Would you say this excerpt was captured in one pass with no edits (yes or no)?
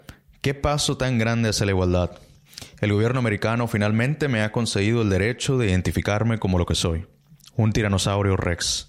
yes